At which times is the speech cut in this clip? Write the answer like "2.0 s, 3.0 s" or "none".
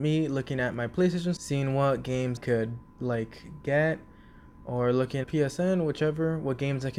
1.4 s, 2.4 s, 2.9 s, 5.2 s